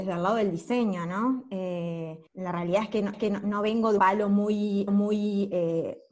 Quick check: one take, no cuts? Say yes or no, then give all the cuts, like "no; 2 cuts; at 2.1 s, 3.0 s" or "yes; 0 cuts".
no; 4 cuts; at 2.3 s, 3.1 s, 4.0 s, 4.9 s